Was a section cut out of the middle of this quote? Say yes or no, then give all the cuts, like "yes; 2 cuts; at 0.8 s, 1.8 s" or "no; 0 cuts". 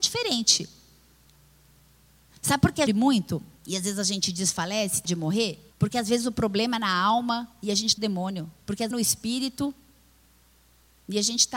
yes; 8 cuts; at 2.9 s, 3.6 s, 5.0 s, 5.7 s, 7.5 s, 8.0 s, 8.6 s, 8.9 s